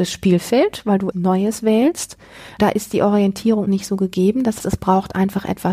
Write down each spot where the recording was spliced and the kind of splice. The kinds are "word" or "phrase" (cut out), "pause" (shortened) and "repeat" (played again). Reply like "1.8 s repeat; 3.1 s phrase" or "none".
1.1 s word; 2.6 s word; 3.7 s word; 4.6 s word